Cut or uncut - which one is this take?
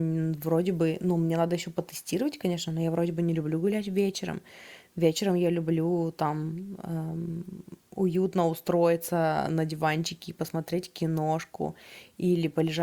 uncut